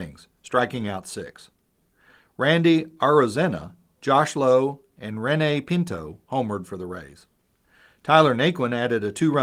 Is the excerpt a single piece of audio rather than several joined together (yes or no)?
yes